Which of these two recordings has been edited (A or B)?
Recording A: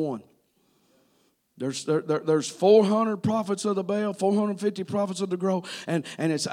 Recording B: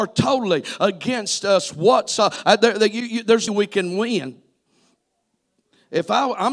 B